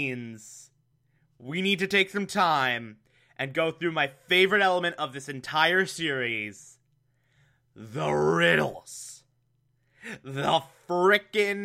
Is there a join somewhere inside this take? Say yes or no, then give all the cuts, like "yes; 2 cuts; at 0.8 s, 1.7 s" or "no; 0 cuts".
no; 0 cuts